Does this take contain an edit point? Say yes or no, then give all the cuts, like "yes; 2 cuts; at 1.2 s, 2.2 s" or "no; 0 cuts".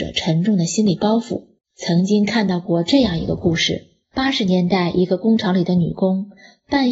yes; 2 cuts; at 1.6 s, 4.0 s